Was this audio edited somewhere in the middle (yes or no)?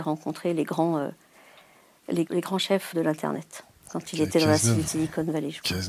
yes